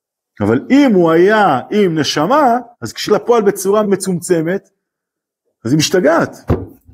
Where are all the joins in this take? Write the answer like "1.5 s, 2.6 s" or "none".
2.7 s, 3.1 s, 3.8 s

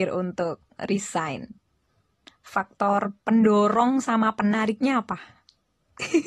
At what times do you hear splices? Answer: none

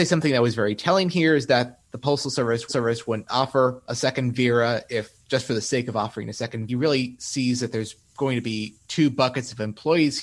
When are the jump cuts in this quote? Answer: 2.7 s, 6.7 s

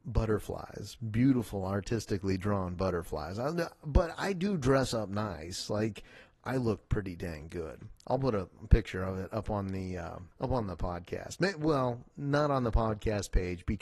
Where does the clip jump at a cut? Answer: 10.3 s

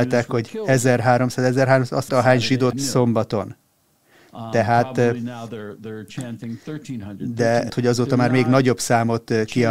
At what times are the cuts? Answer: 2.1 s, 2.7 s, 7.7 s

